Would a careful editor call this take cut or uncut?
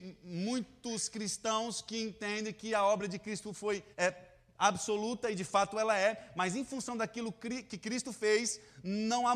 cut